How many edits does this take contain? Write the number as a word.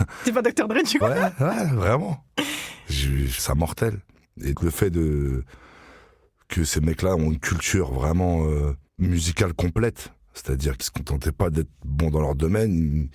four